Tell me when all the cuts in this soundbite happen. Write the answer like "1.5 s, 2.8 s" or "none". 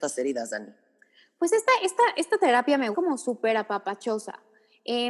2.9 s